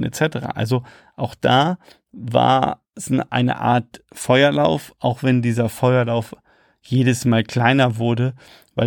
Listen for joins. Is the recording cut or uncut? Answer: uncut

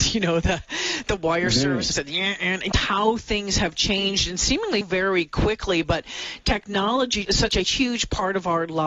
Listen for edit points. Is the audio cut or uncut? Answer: cut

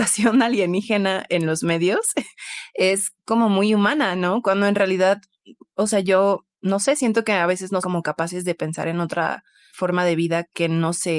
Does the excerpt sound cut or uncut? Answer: cut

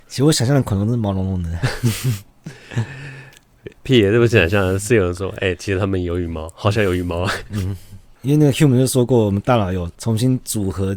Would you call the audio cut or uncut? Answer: uncut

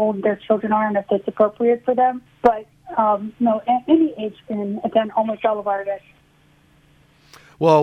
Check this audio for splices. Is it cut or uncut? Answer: cut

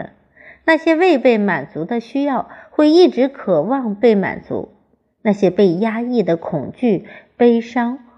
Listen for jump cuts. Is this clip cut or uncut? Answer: uncut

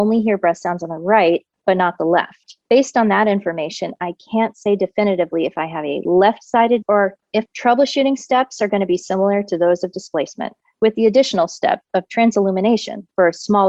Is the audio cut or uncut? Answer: cut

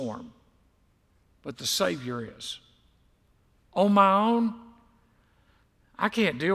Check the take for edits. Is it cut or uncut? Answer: uncut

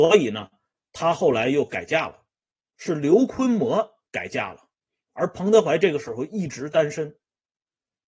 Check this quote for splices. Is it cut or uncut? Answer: uncut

